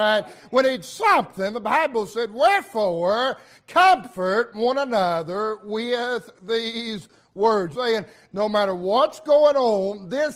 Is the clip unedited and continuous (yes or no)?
no